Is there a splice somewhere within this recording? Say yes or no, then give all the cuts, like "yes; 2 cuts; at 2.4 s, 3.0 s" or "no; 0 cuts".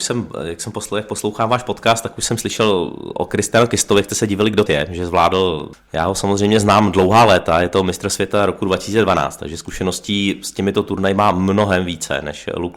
yes; 1 cut; at 4.7 s